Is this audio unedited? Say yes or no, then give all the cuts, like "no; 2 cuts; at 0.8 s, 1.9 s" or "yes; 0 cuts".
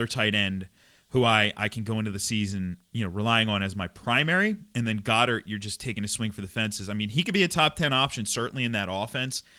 yes; 0 cuts